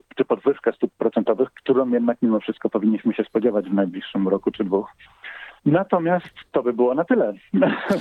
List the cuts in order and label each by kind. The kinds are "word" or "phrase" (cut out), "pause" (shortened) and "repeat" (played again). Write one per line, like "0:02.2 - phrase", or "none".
0:05.6 - pause